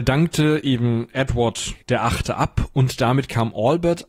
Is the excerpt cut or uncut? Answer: cut